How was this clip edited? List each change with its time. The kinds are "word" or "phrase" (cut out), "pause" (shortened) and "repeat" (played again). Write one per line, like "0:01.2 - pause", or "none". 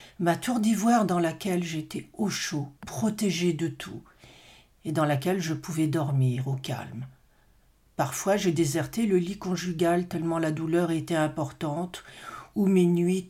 0:02.8 - pause